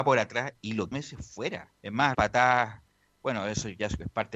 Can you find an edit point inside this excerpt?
yes; 3 cuts; at 0.9 s, 1.8 s, 2.1 s

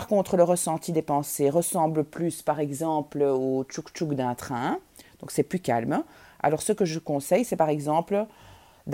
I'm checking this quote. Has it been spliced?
no; 0 cuts

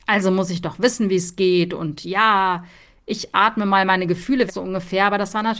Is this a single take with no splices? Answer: no; 1 cut; at 4.5 s

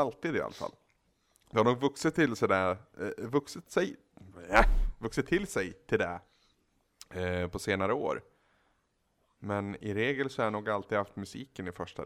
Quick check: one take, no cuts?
yes; 0 cuts

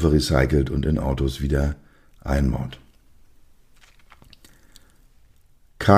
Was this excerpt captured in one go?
yes; 0 cuts

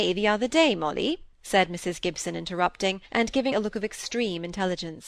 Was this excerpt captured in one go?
no; 3 cuts; at 1.3 s, 3.1 s, 3.5 s

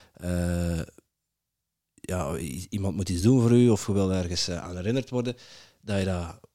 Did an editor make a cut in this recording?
no; 0 cuts

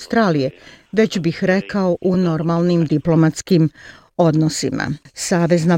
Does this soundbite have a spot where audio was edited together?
no; 0 cuts

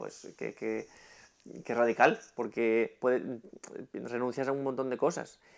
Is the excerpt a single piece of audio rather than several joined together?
yes; 0 cuts

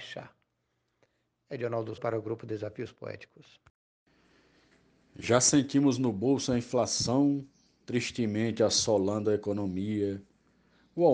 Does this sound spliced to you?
yes; 1 cut; at 2.0 s

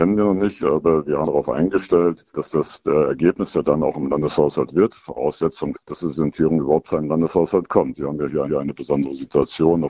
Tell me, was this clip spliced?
yes; 6 cuts; at 1.2 s, 2.3 s, 3.6 s, 4.7 s, 5.7 s, 8.5 s

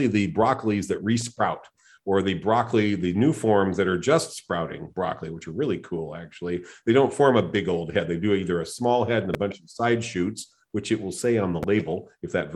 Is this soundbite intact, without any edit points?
yes; 0 cuts

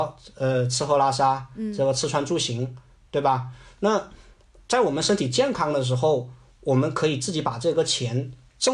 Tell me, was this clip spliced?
no; 0 cuts

